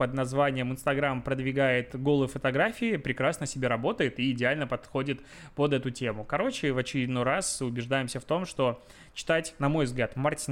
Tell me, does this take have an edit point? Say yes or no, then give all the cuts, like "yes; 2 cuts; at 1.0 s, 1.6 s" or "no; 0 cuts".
no; 0 cuts